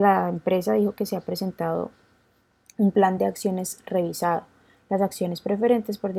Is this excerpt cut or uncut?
uncut